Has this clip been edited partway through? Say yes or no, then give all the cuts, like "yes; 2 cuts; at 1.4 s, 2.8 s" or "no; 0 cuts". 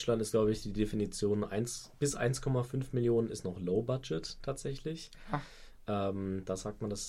no; 0 cuts